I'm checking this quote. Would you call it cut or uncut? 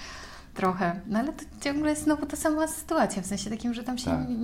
uncut